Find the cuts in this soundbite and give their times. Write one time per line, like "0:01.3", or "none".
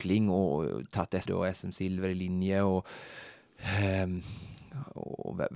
0:01.3